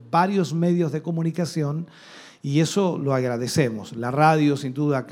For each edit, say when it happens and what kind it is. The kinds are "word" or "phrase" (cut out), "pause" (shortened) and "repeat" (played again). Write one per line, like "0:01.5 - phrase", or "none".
none